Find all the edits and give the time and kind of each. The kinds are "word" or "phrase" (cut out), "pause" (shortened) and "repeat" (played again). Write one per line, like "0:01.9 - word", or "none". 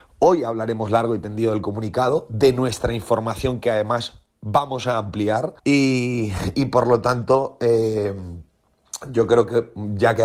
0:05.6 - pause